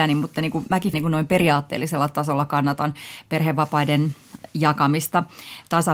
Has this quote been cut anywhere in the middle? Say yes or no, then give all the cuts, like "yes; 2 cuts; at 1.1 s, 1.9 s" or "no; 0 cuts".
yes; 1 cut; at 0.9 s